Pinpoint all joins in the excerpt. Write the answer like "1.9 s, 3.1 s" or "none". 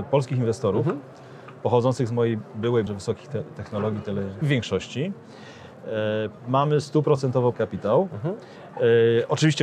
2.9 s, 4.4 s, 7.5 s